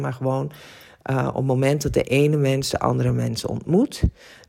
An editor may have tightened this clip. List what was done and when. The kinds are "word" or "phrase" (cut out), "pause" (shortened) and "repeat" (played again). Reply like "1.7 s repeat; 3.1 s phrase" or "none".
none